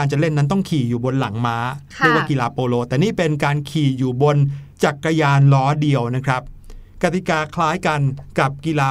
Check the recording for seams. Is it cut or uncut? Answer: cut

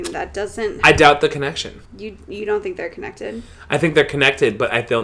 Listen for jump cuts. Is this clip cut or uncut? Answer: cut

